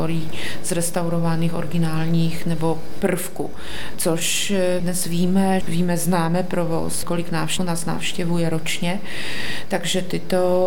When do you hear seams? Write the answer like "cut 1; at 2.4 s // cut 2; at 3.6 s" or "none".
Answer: cut 1; at 3.0 s // cut 2; at 4.8 s // cut 3; at 5.6 s // cut 4; at 7.0 s // cut 5; at 7.6 s